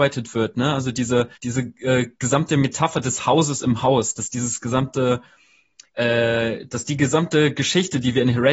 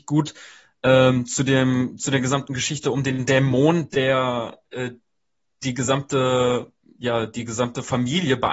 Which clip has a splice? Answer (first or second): first